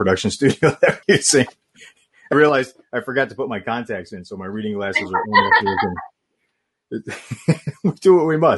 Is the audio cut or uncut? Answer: cut